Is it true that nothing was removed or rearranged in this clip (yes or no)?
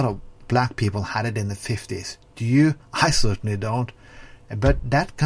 no